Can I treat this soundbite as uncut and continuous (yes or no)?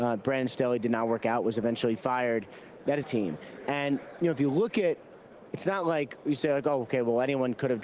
no